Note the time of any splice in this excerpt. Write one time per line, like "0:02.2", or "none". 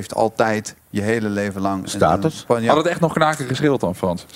none